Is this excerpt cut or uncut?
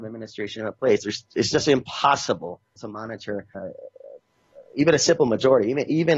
cut